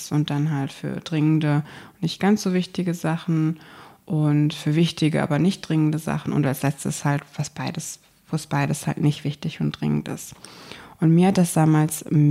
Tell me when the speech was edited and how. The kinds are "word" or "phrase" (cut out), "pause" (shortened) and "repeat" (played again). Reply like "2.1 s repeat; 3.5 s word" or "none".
none